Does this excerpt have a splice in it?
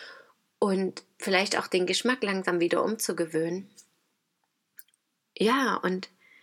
no; 0 cuts

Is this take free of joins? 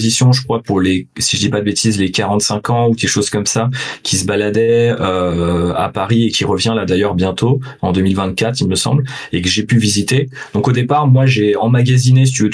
yes; 0 cuts

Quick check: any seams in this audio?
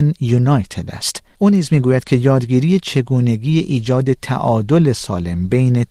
no; 0 cuts

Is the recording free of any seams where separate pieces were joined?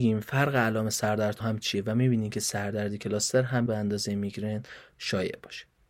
no; 2 cuts; at 1.4 s, 3.7 s

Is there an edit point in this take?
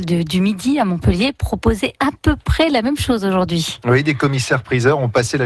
no; 0 cuts

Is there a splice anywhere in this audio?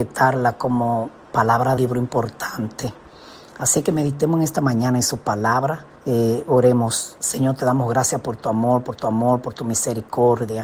yes; 3 cuts; at 1.8 s, 6.0 s, 9.0 s

